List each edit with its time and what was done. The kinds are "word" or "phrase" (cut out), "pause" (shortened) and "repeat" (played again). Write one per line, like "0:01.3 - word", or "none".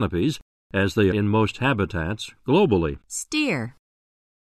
0:01.1 - word
0:03.0 - pause